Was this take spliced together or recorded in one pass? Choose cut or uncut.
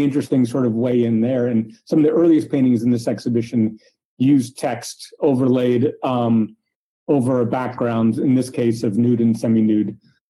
uncut